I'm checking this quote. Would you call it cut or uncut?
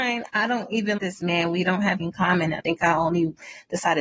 cut